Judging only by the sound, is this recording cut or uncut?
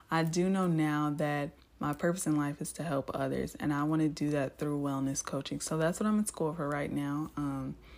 cut